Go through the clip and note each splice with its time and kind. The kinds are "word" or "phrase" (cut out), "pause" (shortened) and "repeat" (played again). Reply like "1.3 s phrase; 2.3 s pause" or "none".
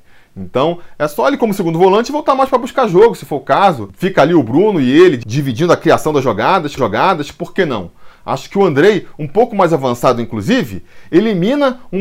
6.8 s repeat